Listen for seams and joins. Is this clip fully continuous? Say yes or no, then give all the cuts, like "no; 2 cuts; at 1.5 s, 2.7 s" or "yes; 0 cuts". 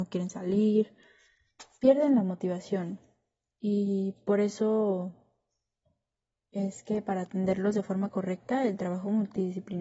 yes; 0 cuts